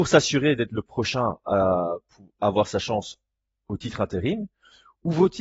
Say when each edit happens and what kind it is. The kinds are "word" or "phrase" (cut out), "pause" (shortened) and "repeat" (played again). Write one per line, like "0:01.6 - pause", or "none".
none